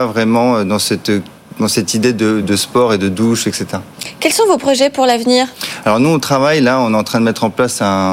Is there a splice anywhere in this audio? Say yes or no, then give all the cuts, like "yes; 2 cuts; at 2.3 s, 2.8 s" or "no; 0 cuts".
yes; 1 cut; at 2.4 s